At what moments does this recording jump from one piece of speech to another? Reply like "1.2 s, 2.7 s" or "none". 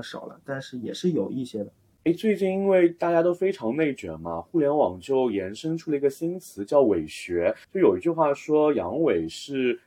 none